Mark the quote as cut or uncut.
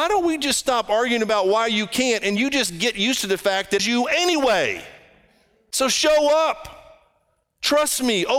cut